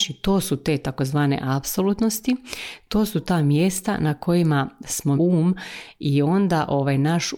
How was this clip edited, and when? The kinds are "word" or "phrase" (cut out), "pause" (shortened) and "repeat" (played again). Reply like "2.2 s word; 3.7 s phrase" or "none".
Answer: 5.2 s phrase